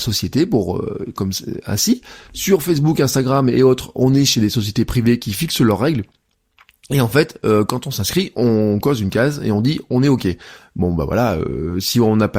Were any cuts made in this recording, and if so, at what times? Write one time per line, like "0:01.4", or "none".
none